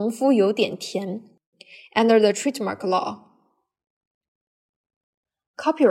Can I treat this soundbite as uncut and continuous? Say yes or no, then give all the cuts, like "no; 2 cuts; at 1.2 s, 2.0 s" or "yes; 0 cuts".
yes; 0 cuts